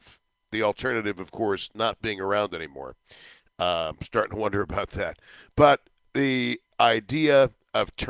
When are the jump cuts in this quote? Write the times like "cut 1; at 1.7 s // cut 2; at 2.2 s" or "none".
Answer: none